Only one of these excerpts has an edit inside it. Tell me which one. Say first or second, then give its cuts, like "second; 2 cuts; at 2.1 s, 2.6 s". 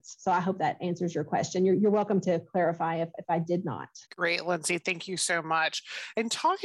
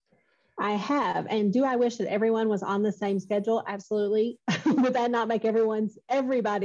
first; 1 cut; at 4.1 s